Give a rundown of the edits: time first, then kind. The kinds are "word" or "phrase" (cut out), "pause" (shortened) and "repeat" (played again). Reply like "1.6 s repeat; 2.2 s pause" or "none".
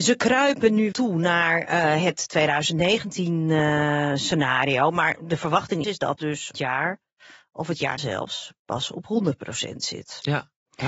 0.9 s word; 5.8 s word; 6.2 s word; 6.5 s word; 8.0 s word